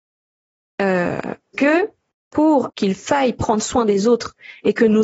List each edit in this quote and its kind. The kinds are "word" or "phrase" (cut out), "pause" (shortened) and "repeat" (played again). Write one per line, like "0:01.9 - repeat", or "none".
0:01.5 - word
0:02.7 - word